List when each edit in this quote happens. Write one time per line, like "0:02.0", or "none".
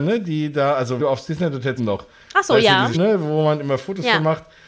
0:01.0
0:01.8
0:02.9